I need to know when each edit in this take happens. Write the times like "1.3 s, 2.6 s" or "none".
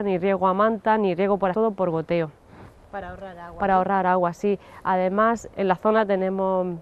1.5 s, 5.5 s